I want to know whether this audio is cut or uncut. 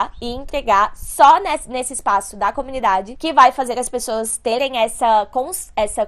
uncut